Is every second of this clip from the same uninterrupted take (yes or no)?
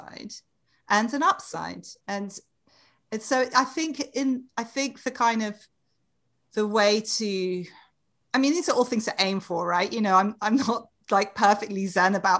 yes